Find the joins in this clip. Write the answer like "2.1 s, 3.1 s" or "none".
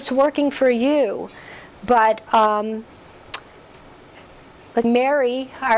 4.8 s